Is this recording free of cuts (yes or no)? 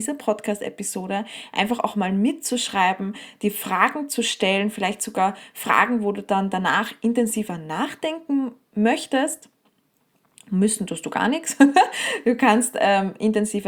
yes